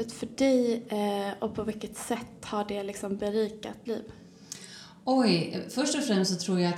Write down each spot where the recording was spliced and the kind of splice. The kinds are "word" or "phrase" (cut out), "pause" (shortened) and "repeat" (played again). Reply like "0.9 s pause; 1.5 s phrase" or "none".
3.9 s word